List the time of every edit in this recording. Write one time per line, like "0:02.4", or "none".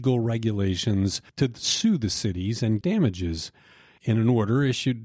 0:01.3
0:02.8